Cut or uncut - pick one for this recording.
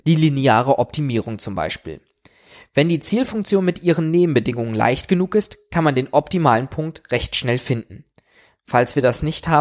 uncut